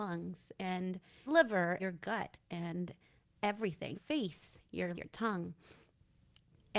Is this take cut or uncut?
cut